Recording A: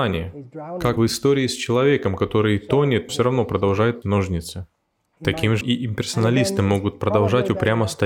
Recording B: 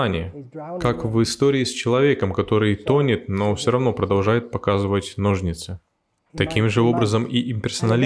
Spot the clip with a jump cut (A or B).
A